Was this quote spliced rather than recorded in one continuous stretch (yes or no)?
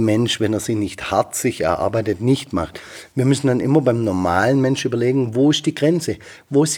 no